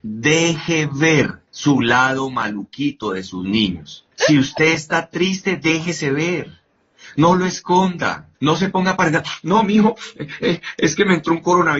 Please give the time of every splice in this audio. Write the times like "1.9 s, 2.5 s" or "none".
1.5 s, 4.1 s, 8.3 s